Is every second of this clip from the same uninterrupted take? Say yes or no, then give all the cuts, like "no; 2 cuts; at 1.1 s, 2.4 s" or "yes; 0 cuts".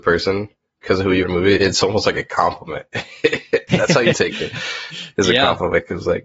no; 4 cuts; at 1.2 s, 1.6 s, 3.7 s, 4.1 s